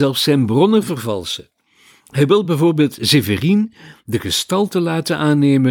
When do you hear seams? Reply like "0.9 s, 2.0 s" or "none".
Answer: none